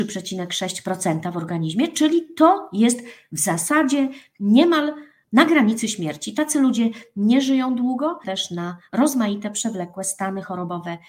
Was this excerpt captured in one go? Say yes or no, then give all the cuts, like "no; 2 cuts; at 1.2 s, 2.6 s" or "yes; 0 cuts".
no; 1 cut; at 8.2 s